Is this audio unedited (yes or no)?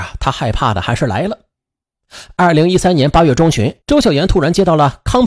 no